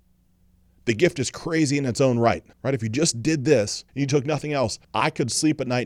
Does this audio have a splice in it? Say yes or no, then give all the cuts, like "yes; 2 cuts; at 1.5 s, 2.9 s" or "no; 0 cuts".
yes; 3 cuts; at 2.5 s, 3.9 s, 4.8 s